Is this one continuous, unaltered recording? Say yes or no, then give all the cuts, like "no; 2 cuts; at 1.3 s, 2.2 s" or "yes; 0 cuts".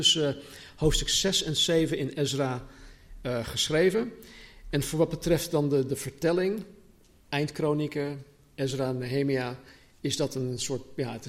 yes; 0 cuts